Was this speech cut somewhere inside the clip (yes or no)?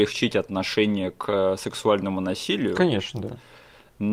no